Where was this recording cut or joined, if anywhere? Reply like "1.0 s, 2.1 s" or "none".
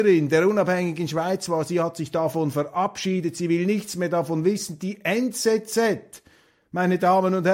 none